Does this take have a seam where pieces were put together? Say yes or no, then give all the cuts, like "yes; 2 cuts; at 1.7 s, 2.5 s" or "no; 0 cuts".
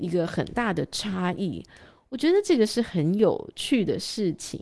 no; 0 cuts